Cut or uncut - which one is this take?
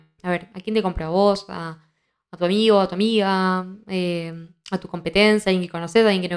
uncut